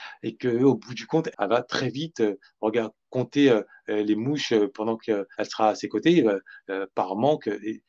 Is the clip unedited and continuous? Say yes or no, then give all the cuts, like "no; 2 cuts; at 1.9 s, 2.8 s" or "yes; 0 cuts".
no; 2 cuts; at 1.3 s, 5.3 s